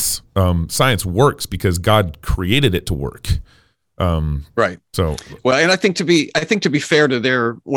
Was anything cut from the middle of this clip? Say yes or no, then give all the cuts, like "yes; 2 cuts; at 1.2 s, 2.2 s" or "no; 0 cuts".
no; 0 cuts